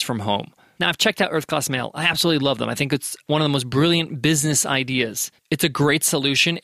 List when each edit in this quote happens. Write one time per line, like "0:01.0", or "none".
none